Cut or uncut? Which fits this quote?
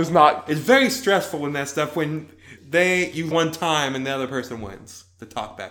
cut